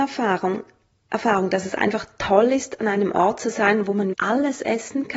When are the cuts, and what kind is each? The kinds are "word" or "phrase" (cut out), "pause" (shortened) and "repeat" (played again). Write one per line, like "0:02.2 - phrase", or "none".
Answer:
0:04.1 - word